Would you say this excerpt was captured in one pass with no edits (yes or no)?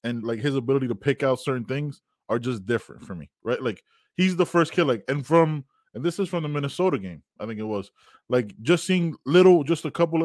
yes